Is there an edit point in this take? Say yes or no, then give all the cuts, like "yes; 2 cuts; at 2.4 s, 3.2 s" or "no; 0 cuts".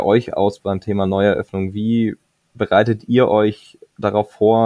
no; 0 cuts